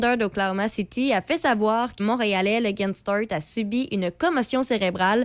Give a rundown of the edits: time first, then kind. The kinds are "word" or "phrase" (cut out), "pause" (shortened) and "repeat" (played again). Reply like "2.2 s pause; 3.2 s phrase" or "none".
2.0 s word